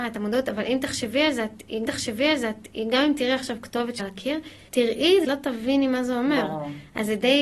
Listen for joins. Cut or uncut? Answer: cut